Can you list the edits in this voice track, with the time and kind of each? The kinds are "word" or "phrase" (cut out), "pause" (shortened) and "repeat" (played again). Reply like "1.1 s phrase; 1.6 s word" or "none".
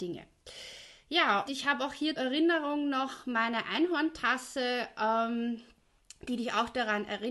1.5 s word; 2.2 s word